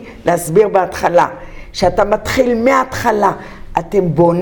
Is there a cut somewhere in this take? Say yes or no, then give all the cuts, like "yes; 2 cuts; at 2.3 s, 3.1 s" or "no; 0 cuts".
no; 0 cuts